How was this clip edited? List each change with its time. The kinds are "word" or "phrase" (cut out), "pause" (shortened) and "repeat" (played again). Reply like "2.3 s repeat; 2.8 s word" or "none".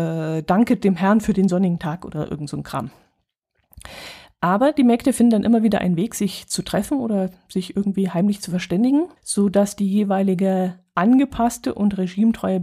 9.2 s pause